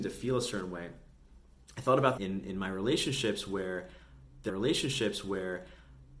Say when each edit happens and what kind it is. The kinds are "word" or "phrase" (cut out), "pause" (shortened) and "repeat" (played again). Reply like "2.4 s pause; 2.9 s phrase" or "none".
2.2 s phrase; 4.5 s repeat